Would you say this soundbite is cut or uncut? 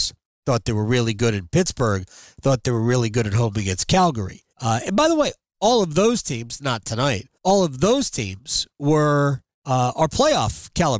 cut